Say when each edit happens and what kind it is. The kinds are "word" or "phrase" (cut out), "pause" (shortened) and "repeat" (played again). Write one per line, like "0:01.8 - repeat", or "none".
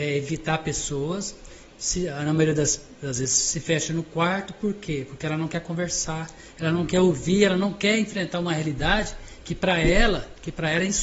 none

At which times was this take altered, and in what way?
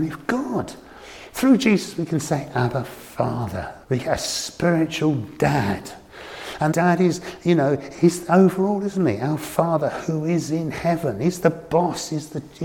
0:03.8 - pause
0:06.7 - word
0:07.9 - word

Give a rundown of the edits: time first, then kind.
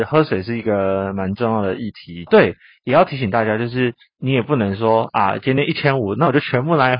0:02.3 - phrase

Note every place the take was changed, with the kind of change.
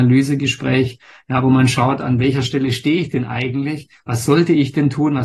none

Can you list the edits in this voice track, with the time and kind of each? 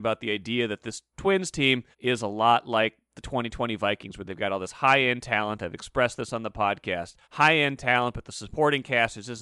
0:01.9 - pause
0:07.2 - pause

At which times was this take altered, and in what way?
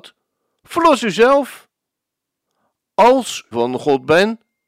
0:03.5 - phrase

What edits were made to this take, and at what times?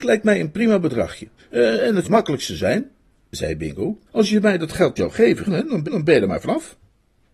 0:01.4 - pause
0:02.0 - word
0:04.1 - pause
0:05.0 - word
0:05.5 - word
0:05.8 - repeat

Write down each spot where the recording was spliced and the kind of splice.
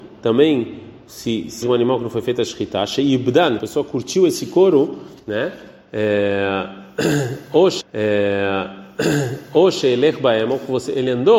0:01.6 - phrase
0:03.6 - phrase
0:05.2 - pause
0:07.8 - repeat

